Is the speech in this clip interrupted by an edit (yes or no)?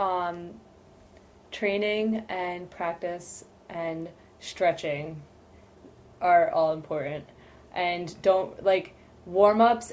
no